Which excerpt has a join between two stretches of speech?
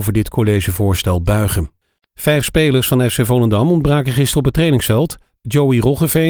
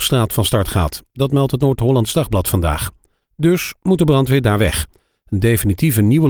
first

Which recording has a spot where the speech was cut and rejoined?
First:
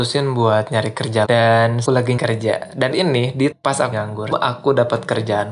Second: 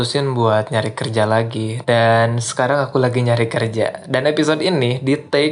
first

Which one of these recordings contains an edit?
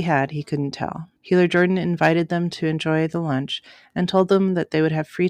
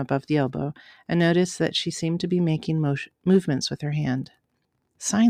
first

